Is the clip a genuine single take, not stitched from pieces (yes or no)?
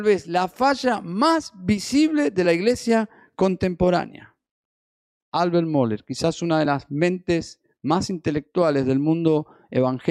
yes